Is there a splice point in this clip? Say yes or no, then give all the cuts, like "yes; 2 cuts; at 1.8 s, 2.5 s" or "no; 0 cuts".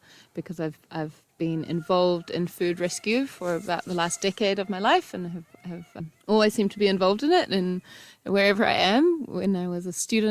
yes; 1 cut; at 6.2 s